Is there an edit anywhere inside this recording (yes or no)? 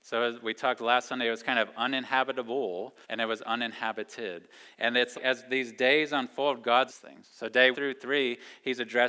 yes